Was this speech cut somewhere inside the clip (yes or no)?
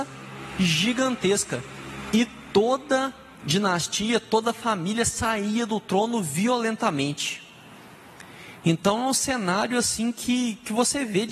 no